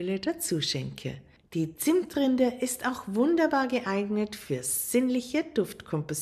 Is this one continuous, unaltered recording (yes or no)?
yes